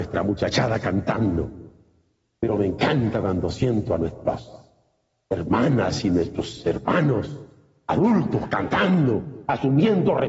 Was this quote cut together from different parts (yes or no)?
no